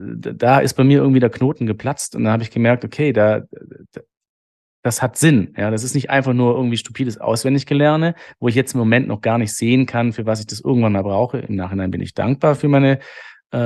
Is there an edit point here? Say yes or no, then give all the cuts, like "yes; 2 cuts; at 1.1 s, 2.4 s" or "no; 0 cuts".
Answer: no; 0 cuts